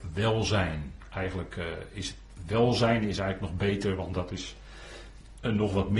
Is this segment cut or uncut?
uncut